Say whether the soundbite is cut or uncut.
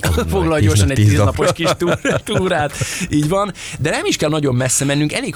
cut